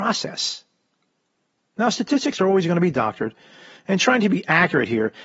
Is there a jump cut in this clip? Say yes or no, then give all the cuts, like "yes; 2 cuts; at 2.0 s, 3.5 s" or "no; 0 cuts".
no; 0 cuts